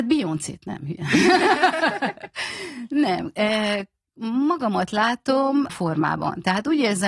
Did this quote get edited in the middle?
yes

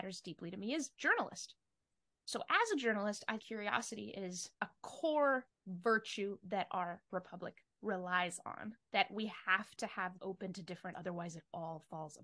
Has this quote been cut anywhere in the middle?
yes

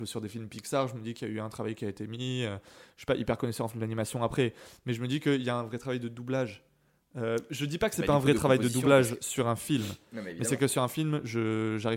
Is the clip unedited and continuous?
yes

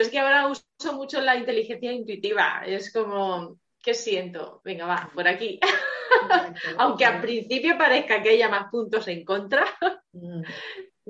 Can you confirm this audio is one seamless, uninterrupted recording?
yes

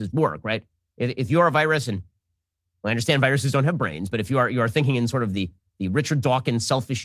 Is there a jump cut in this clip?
no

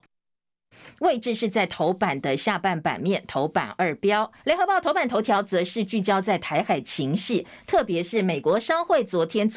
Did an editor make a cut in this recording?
yes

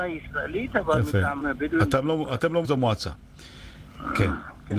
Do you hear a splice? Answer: yes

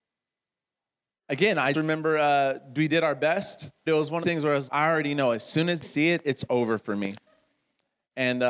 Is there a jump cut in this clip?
yes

